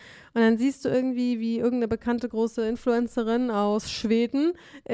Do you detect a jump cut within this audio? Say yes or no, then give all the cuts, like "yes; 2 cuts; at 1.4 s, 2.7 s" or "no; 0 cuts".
no; 0 cuts